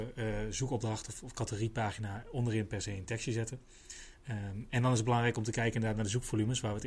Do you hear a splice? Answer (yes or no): no